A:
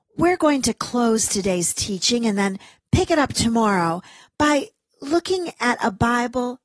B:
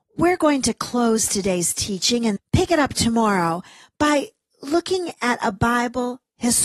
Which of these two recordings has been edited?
B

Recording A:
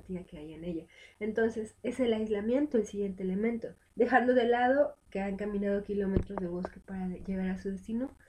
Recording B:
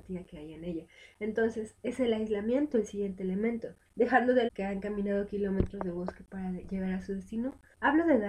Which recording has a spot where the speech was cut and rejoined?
B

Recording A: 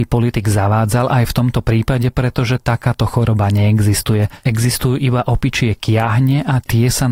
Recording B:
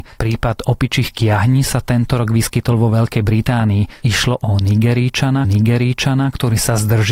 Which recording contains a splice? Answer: B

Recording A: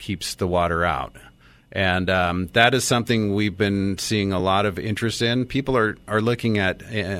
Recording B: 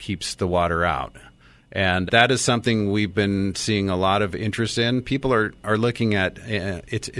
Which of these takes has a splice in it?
B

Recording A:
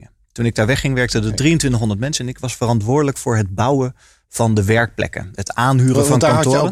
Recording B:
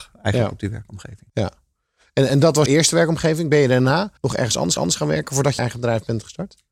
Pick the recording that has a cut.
B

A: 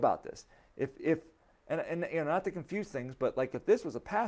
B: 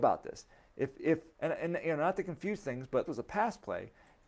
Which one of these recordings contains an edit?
B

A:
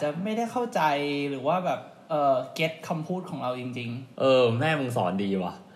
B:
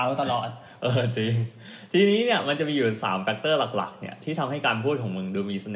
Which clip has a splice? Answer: A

